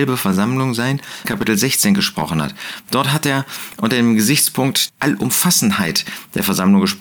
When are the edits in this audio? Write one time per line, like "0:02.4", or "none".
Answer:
0:01.2
0:04.9